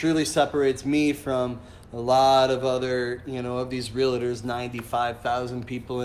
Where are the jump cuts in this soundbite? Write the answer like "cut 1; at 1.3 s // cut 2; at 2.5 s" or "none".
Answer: none